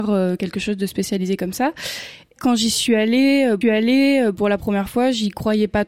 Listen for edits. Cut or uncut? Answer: cut